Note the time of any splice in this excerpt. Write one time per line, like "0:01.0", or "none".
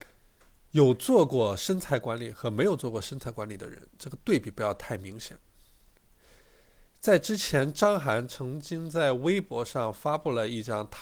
none